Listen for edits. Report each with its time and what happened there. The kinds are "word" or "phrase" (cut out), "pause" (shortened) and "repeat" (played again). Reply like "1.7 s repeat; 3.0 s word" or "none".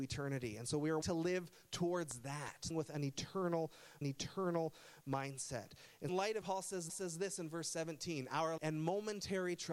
1.0 s word; 2.7 s word; 4.0 s repeat; 6.1 s word; 6.4 s word; 6.9 s repeat; 8.6 s word